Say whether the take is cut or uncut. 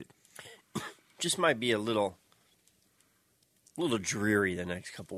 uncut